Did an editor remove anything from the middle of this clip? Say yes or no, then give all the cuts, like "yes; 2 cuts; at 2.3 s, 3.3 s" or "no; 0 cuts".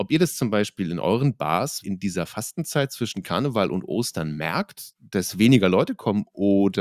yes; 1 cut; at 1.8 s